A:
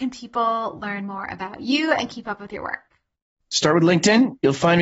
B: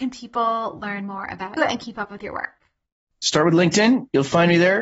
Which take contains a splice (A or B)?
B